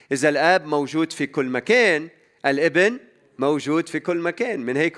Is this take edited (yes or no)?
no